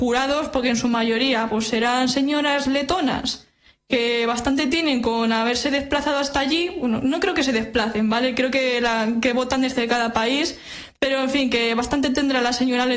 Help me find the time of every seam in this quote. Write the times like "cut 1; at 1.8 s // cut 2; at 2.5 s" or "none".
none